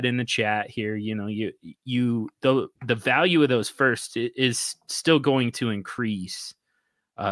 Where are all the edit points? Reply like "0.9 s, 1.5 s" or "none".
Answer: 2.8 s